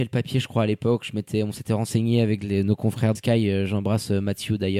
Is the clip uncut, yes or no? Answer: no